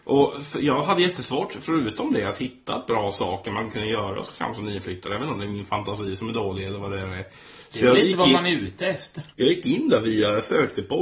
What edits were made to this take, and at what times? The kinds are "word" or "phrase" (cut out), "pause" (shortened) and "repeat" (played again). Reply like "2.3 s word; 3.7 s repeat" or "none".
9.3 s pause